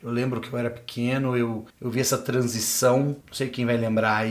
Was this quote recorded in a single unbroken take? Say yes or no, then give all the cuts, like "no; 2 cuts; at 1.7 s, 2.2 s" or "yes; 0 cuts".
no; 2 cuts; at 1.7 s, 3.2 s